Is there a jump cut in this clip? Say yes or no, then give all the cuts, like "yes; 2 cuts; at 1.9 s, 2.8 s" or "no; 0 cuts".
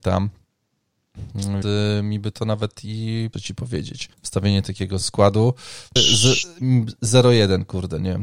yes; 5 cuts; at 1.6 s, 3.3 s, 4.1 s, 5.0 s, 6.0 s